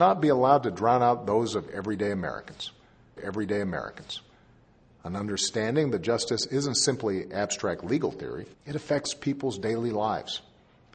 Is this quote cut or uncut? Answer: cut